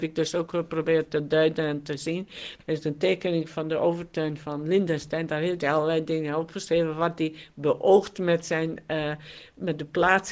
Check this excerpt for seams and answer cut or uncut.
uncut